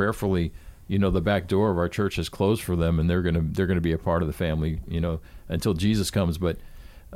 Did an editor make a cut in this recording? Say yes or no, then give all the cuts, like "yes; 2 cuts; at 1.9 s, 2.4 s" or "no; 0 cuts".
no; 0 cuts